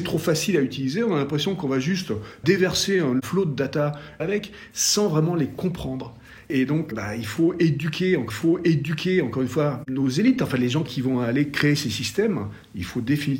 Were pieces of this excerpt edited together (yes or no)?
yes